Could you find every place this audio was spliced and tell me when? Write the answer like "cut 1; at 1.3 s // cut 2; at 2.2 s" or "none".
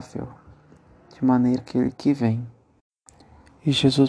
cut 1; at 1.6 s